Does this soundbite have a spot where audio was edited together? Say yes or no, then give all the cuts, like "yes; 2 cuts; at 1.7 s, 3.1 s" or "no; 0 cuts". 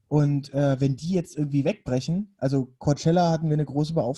no; 0 cuts